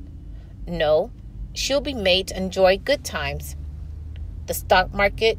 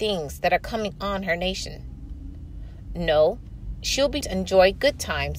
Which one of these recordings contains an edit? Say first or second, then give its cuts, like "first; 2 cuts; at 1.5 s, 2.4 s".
second; 1 cut; at 4.2 s